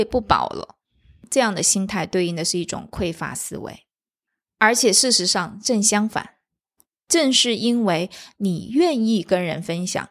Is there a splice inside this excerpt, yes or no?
no